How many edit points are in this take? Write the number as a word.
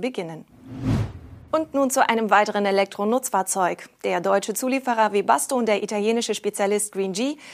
zero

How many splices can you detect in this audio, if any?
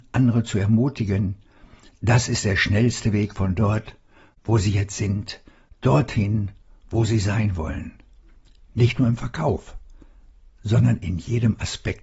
zero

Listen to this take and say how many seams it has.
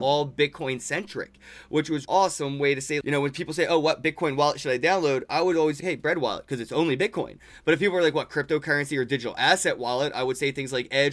three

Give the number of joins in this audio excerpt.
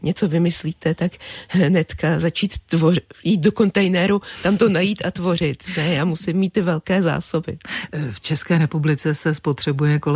zero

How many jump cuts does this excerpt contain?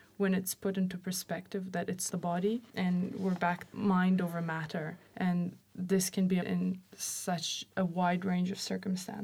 six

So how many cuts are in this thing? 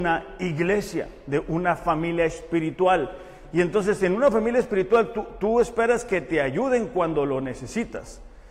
zero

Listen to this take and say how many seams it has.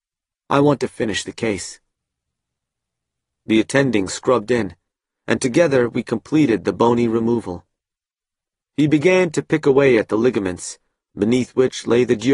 zero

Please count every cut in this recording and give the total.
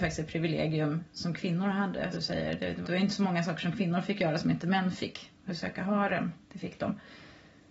four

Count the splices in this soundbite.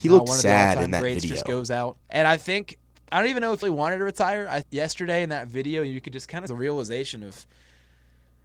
four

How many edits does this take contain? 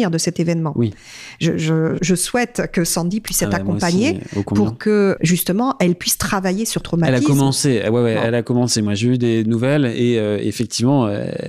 three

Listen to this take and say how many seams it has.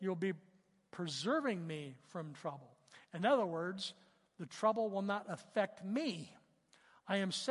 zero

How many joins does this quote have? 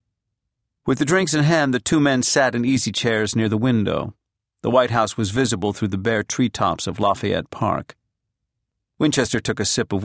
zero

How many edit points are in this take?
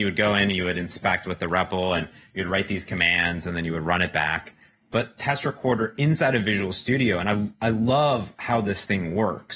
zero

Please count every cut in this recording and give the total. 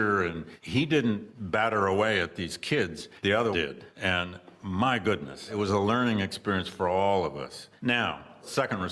one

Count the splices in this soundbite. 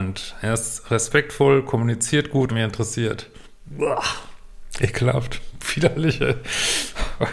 one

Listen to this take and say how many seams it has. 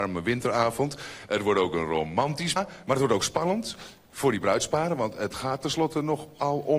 one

